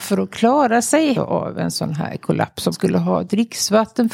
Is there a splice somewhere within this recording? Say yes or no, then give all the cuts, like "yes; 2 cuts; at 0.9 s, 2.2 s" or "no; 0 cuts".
yes; 2 cuts; at 1.1 s, 2.7 s